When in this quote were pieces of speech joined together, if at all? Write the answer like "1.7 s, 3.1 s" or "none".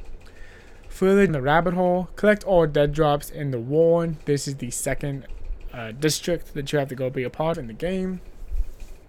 1.3 s, 7.5 s